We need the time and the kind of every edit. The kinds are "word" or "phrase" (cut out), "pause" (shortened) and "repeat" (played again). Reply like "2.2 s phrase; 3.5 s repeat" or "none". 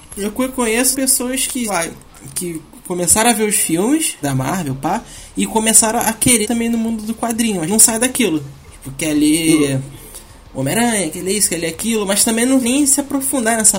0.9 s word; 1.7 s word; 4.2 s word; 6.4 s word; 7.7 s word; 12.6 s word